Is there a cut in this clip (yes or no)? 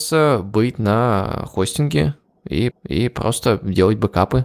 yes